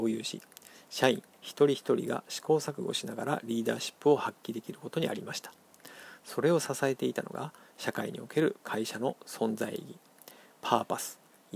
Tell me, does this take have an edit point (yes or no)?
no